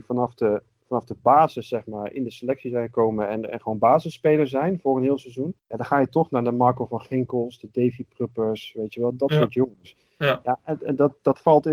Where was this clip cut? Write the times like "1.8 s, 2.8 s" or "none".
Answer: 5.6 s

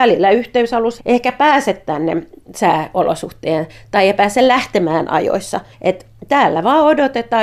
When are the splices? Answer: 1.0 s, 5.7 s

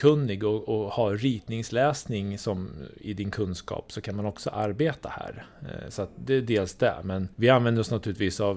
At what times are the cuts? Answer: 7.3 s

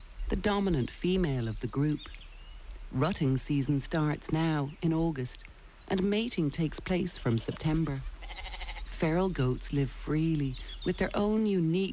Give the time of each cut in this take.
none

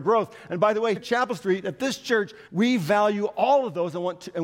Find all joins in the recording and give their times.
1.0 s, 2.5 s

